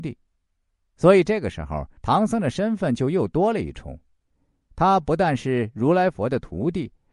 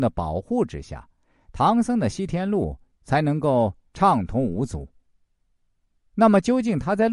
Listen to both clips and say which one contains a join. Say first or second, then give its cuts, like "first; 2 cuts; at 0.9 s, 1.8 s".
first; 1 cut; at 2.0 s